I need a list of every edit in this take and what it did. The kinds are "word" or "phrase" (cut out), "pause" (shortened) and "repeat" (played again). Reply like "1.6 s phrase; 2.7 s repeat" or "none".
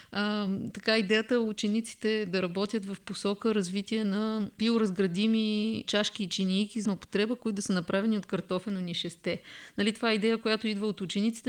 6.8 s word